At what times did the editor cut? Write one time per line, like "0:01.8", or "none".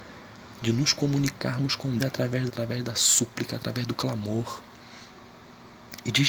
0:02.0
0:02.5